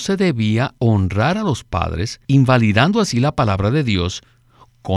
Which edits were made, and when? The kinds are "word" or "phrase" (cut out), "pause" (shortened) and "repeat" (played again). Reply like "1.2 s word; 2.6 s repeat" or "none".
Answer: 2.2 s pause